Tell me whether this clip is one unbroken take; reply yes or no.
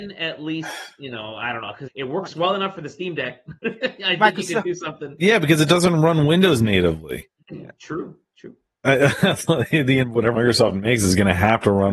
no